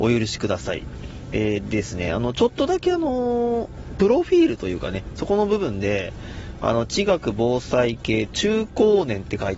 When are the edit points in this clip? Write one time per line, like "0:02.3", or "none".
none